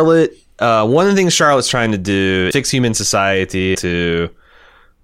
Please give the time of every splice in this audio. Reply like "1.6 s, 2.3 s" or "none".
2.5 s, 3.7 s